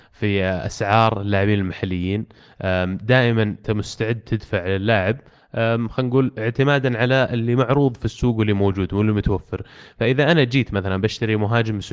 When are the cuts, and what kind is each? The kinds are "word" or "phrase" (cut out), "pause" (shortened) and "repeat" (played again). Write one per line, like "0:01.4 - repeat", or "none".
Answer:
0:03.6 - word